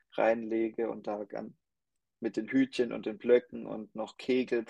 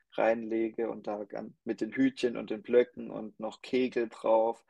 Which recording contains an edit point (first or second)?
second